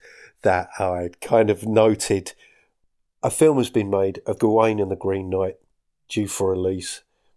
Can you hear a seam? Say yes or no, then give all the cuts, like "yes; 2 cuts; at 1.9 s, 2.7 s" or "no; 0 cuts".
no; 0 cuts